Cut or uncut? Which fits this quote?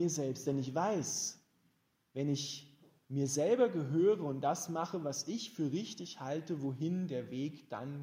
uncut